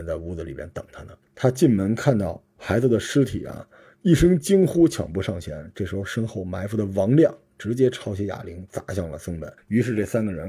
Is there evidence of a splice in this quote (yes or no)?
yes